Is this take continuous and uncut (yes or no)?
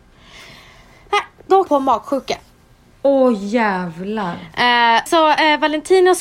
no